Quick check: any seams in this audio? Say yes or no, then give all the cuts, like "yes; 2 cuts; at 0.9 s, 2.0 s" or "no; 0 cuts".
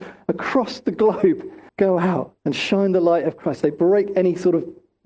yes; 2 cuts; at 1.7 s, 2.4 s